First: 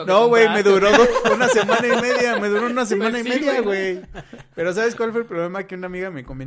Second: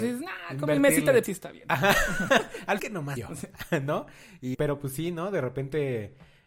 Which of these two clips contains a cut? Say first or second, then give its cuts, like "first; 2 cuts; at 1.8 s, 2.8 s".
second; 4 cuts; at 1.2 s, 2.8 s, 3.2 s, 4.5 s